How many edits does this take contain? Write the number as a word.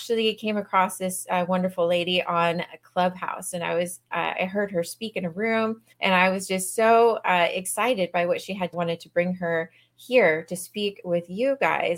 two